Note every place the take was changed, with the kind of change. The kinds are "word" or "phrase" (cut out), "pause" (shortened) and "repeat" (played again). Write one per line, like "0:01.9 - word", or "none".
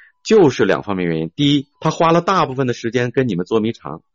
0:01.7 - pause